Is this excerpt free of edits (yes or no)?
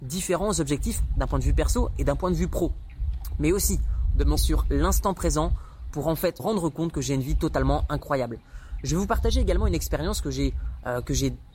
no